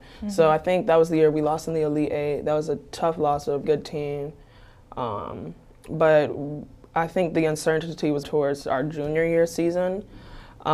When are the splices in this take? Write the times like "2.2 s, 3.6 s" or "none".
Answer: 3.6 s, 8.2 s